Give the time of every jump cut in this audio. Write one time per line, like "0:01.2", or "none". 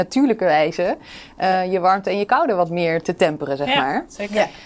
0:03.0